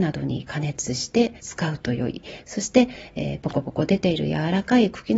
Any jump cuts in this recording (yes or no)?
yes